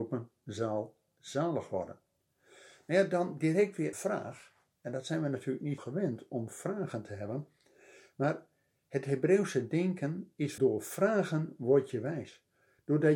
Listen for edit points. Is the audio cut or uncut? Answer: cut